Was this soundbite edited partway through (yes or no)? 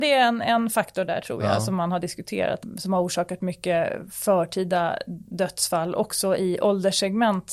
no